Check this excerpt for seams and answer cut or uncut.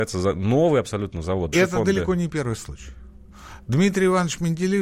cut